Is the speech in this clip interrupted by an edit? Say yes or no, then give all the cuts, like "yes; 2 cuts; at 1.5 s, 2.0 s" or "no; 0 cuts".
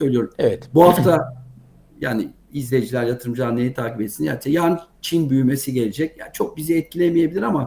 no; 0 cuts